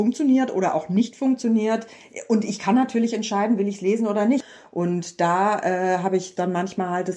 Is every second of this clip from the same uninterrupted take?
yes; 0 cuts

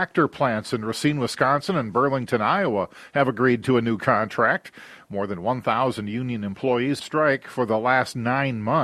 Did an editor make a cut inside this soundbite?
yes; 1 cut; at 7.0 s

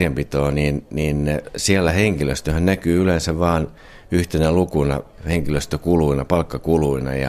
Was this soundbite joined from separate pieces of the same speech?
no; 0 cuts

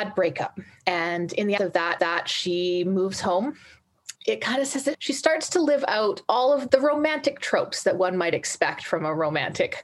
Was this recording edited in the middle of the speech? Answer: yes; 5 cuts; at 1.6 s, 2.0 s, 4.2 s, 4.9 s, 6.7 s

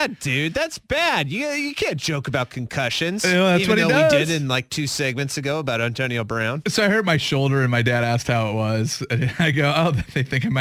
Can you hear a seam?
no; 0 cuts

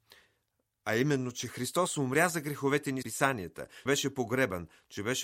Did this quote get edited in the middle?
yes; 2 cuts; at 3.0 s, 3.9 s

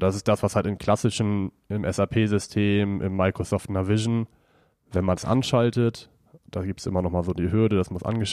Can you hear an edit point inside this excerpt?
no; 0 cuts

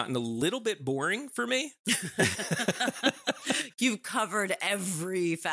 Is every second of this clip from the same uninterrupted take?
yes; 0 cuts

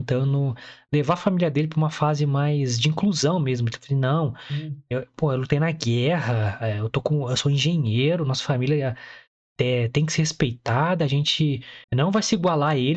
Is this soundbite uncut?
no; 1 cut; at 11.8 s

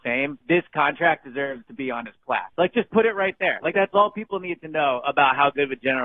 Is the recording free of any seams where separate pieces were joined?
yes; 0 cuts

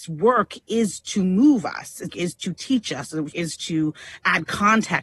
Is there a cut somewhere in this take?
yes; 2 cuts; at 2.1 s, 3.3 s

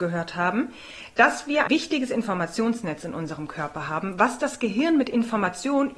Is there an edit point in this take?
yes; 1 cut; at 1.7 s

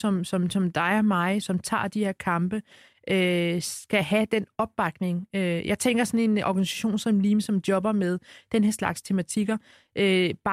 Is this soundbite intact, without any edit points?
no; 1 cut; at 1.4 s

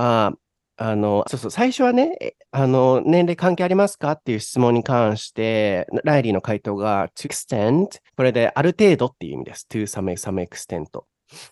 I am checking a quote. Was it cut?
yes; 4 cuts; at 1.2 s, 7.2 s, 8.1 s, 10.1 s

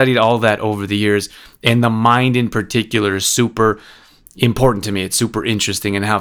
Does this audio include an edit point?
no; 0 cuts

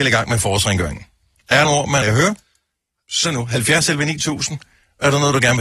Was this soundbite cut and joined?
yes; 3 cuts; at 1.6 s, 2.0 s, 3.2 s

